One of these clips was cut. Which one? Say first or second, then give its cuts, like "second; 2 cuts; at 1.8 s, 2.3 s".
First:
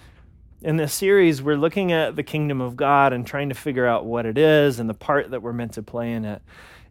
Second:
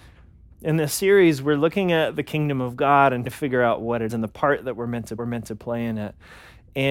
second; 3 cuts; at 3.3 s, 4.1 s, 5.2 s